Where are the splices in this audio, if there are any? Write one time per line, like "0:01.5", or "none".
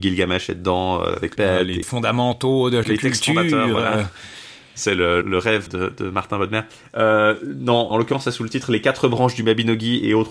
0:01.4
0:01.8
0:02.8
0:05.2
0:05.7
0:07.9

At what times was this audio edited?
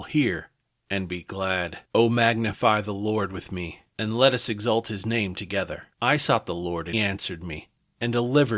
0:01.8
0:03.9
0:05.9
0:06.9

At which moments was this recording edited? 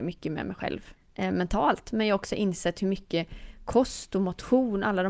none

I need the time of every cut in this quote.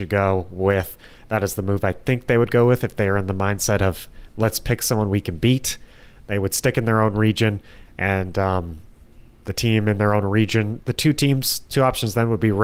none

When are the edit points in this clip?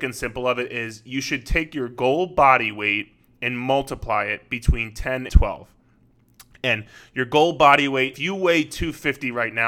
0:05.3
0:08.1

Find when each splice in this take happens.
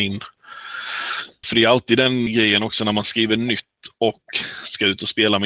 0:01.4
0:02.3

